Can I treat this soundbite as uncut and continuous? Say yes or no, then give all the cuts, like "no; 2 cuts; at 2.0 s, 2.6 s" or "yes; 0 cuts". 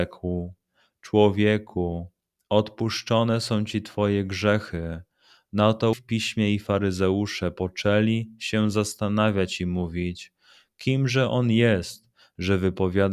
no; 1 cut; at 5.9 s